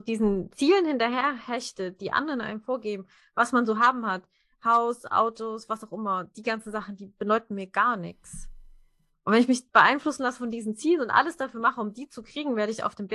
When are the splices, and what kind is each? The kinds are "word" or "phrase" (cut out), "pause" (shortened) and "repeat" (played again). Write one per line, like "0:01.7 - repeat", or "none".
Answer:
none